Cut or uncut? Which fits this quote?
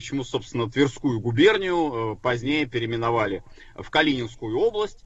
uncut